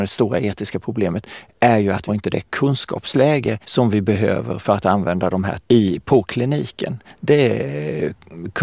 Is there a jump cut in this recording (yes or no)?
yes